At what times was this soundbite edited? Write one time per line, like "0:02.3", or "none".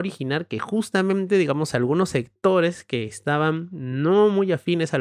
none